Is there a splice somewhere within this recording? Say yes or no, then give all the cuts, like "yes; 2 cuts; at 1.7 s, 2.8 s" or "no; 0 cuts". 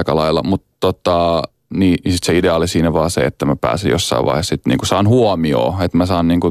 no; 0 cuts